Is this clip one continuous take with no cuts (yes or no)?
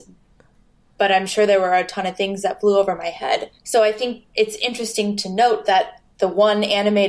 no